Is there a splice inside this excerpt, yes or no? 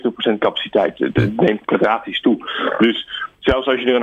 yes